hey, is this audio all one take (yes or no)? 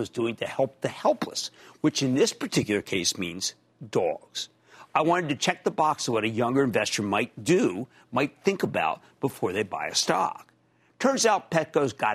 yes